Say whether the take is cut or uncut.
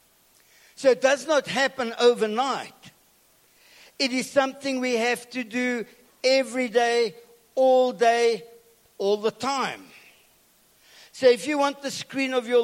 uncut